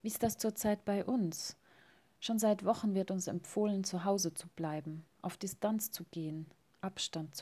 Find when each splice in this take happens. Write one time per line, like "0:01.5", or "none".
none